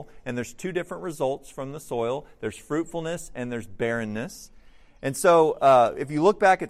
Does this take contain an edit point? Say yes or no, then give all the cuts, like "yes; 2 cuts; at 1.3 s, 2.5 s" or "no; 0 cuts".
no; 0 cuts